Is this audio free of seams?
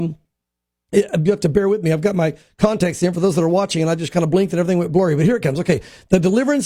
yes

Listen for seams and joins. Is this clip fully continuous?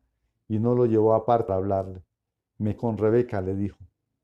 no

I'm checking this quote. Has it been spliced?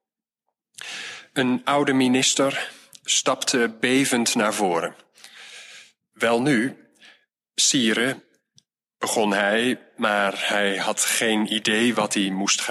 no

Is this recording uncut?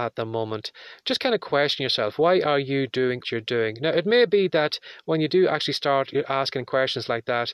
no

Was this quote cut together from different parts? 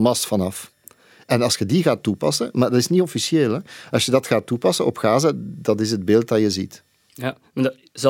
no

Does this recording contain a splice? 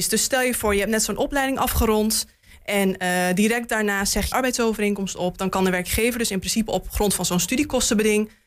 yes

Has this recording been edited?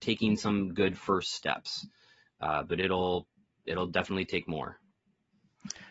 no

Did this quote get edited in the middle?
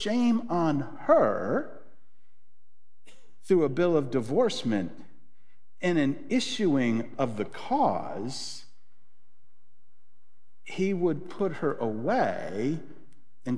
no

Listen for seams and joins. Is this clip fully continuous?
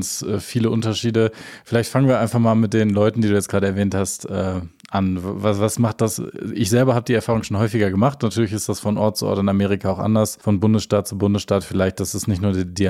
yes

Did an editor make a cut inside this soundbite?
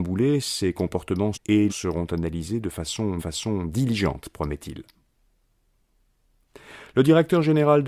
yes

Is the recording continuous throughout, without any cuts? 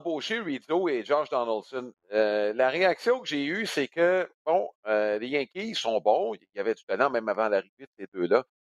no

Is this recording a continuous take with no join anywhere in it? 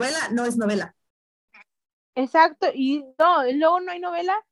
yes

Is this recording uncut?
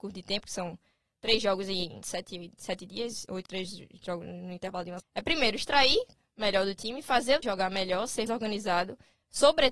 no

